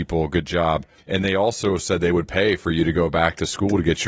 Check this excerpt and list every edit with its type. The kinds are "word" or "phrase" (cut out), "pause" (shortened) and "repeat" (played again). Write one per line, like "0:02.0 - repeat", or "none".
0:01.0 - pause